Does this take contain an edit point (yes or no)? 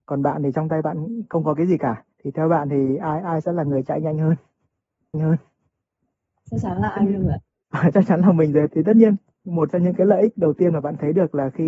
yes